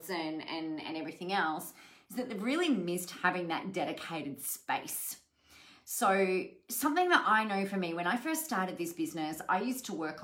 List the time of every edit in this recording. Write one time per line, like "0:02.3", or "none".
none